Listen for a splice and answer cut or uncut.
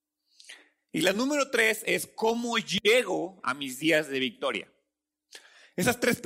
uncut